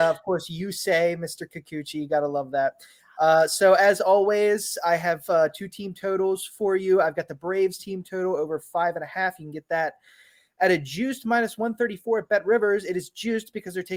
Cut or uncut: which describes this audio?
uncut